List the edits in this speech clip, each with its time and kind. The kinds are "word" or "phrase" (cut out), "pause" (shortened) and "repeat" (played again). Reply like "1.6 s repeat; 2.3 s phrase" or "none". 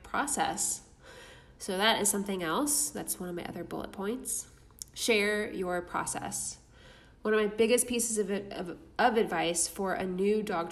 1.6 s pause